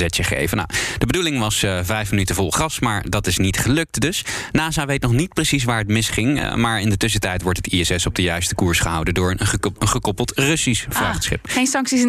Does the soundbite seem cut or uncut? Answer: uncut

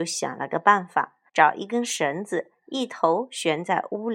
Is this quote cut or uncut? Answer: cut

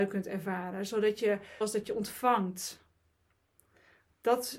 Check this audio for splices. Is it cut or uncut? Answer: cut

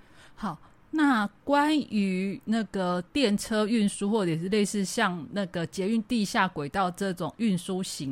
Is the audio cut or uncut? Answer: cut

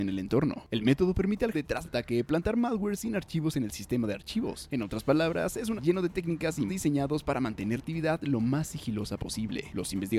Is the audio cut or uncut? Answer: cut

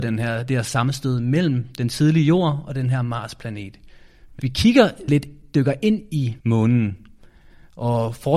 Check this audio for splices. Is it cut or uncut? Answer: cut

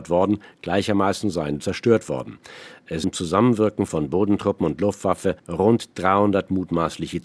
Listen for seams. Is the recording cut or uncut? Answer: cut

